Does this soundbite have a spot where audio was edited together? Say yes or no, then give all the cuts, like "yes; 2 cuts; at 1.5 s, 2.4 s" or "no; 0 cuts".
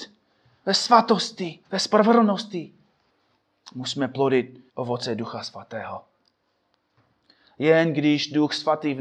yes; 3 cuts; at 1.6 s, 3.1 s, 4.7 s